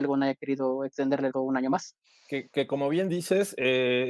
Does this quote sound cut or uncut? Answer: cut